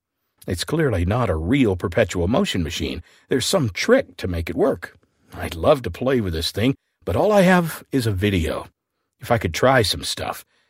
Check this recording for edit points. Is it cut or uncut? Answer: uncut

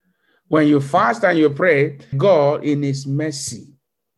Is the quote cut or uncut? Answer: cut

